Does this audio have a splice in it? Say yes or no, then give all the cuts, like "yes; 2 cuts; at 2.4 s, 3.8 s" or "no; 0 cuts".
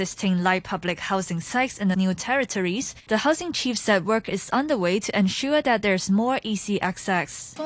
yes; 1 cut; at 1.9 s